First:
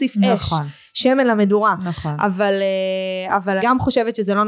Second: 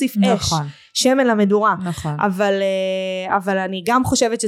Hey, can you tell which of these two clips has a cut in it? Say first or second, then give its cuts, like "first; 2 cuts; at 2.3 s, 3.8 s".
first; 1 cut; at 3.6 s